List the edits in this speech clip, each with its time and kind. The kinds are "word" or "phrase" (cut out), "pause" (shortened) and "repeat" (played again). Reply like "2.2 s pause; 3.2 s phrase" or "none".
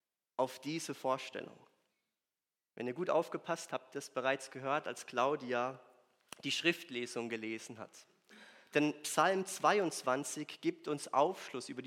1.9 s pause; 3.7 s word